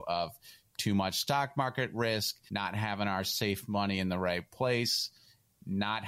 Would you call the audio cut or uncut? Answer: uncut